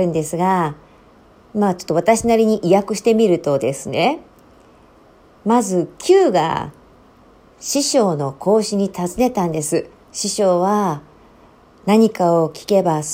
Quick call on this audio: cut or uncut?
cut